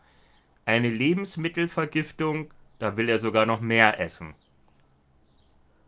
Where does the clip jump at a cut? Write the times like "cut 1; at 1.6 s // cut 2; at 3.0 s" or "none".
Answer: none